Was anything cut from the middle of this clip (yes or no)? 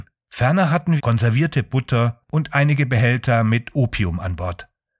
yes